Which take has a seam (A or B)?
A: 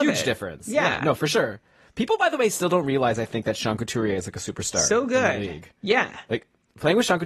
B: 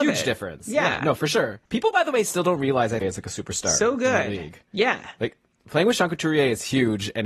B